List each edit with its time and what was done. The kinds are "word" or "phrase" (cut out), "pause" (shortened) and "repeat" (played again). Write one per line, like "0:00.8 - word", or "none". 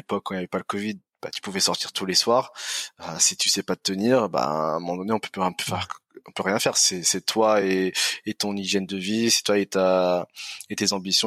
none